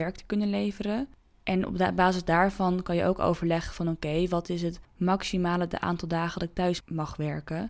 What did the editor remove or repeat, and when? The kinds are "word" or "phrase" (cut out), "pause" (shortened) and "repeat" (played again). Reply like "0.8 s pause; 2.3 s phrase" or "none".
none